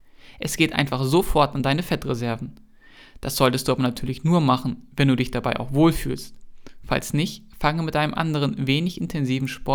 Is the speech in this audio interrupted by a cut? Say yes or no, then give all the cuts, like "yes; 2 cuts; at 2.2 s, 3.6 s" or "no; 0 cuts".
no; 0 cuts